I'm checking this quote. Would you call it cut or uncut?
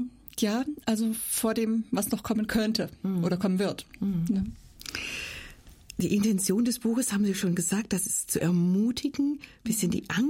uncut